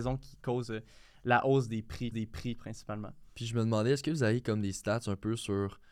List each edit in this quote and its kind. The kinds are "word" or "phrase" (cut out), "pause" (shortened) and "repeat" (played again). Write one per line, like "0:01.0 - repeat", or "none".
0:02.1 - repeat